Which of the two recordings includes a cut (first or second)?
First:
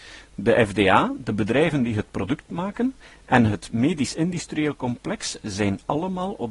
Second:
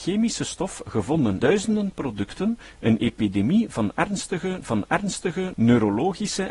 second